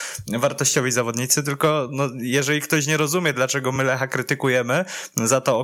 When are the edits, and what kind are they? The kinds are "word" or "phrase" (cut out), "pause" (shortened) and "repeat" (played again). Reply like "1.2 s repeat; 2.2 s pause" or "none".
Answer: none